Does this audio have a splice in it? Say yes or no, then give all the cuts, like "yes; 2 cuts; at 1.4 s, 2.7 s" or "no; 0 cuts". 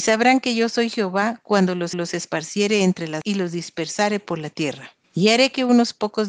yes; 3 cuts; at 1.9 s, 3.2 s, 5.0 s